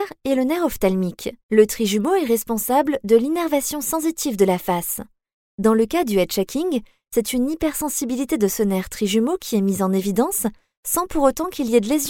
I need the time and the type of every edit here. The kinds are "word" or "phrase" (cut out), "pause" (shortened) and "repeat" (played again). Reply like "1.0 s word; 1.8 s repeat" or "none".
1.4 s pause